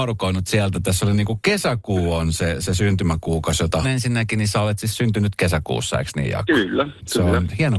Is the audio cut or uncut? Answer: cut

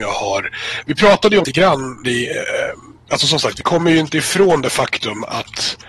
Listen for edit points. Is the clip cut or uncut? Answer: cut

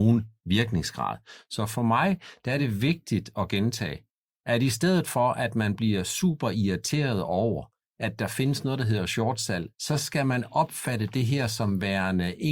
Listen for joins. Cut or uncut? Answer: uncut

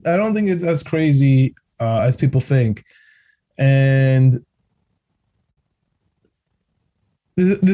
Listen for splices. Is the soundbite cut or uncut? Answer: uncut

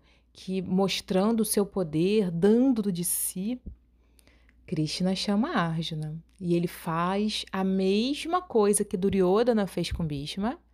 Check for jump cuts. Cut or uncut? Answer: cut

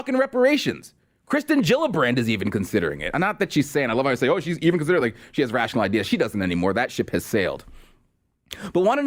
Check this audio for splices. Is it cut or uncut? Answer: uncut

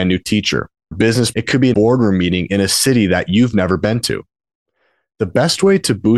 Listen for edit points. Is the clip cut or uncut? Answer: cut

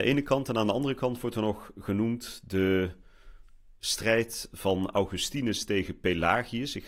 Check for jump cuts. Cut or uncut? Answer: uncut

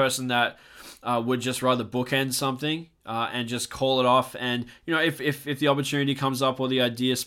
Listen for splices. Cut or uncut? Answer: cut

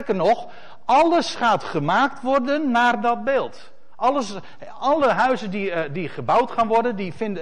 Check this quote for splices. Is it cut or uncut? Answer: uncut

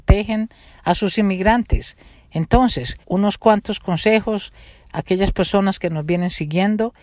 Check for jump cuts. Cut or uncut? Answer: cut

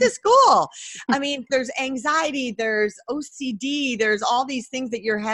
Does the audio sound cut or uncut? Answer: cut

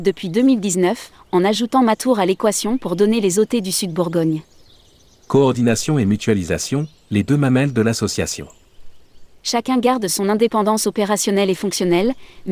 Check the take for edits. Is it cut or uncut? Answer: uncut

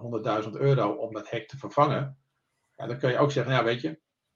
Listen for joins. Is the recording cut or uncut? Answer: uncut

